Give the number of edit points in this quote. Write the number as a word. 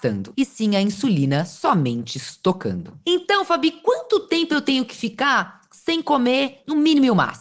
zero